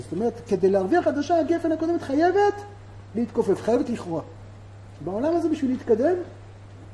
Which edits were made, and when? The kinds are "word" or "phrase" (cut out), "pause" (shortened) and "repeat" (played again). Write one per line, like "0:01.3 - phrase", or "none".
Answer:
0:01.0 - word